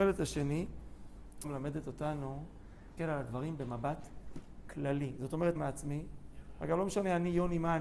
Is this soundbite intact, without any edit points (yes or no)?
no